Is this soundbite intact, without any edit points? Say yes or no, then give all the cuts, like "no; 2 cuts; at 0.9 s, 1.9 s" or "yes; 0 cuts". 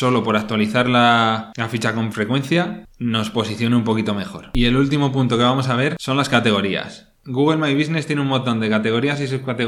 yes; 0 cuts